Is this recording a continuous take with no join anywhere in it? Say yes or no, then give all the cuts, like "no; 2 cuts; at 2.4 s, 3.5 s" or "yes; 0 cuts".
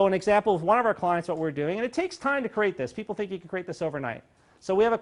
yes; 0 cuts